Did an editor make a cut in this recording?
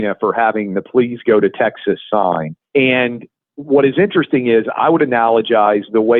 yes; 1 cut; at 2.7 s

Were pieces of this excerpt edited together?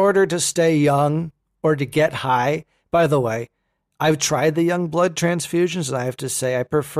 no; 0 cuts

